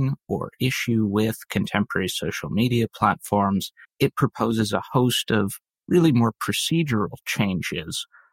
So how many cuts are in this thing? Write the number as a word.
one